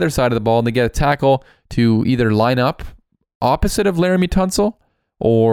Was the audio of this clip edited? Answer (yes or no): no